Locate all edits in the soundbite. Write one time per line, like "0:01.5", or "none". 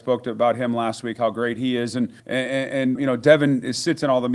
0:02.2
0:02.9